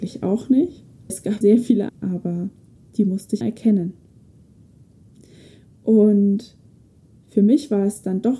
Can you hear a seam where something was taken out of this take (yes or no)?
yes